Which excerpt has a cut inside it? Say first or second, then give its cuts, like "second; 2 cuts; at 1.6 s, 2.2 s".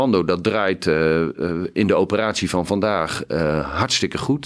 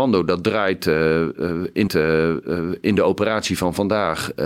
second; 1 cut; at 1.9 s